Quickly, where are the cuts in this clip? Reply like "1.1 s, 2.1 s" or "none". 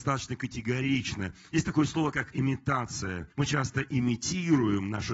3.3 s